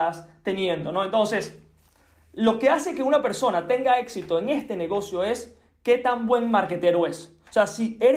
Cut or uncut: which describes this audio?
uncut